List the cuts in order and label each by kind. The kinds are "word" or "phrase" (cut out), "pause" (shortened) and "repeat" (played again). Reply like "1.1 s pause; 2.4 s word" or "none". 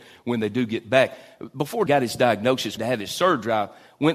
1.9 s phrase; 2.8 s phrase